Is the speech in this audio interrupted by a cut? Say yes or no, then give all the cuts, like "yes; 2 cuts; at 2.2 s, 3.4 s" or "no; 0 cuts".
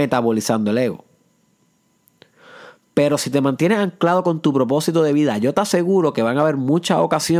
no; 0 cuts